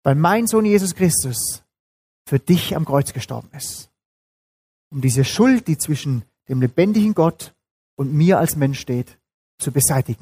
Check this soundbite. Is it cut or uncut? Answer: uncut